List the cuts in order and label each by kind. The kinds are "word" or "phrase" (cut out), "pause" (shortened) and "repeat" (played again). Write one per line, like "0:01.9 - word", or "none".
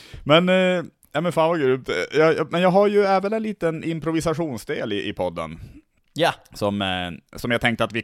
none